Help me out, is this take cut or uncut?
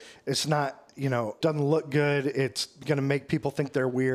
cut